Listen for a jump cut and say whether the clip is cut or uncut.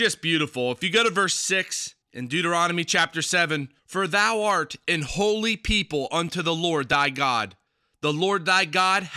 cut